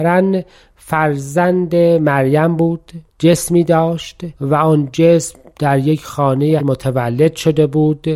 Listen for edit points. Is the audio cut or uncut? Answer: cut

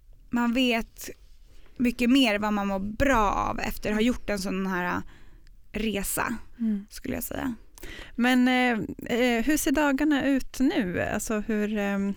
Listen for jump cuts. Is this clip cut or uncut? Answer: cut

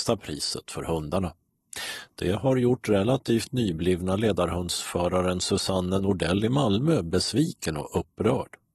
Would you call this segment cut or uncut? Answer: uncut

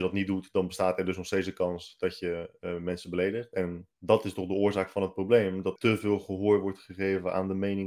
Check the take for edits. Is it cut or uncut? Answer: cut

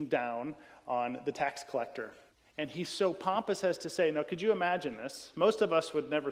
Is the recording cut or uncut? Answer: cut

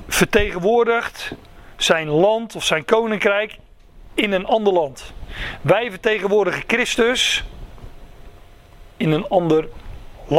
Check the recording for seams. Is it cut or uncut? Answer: cut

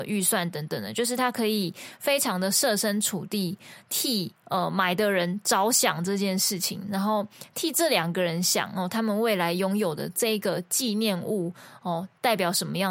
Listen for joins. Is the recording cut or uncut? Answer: cut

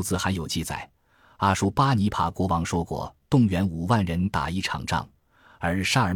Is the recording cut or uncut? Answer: uncut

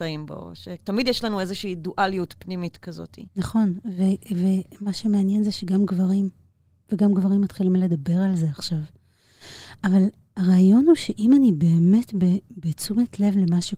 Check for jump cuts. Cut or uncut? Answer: cut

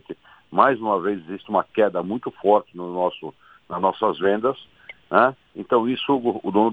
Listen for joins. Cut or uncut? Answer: uncut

